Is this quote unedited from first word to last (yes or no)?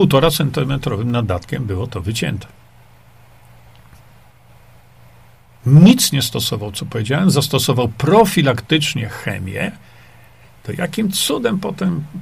yes